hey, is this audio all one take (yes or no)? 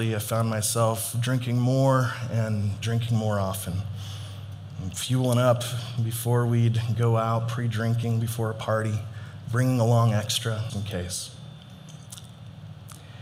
no